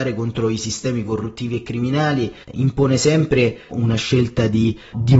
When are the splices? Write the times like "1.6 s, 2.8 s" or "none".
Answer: 2.4 s, 3.7 s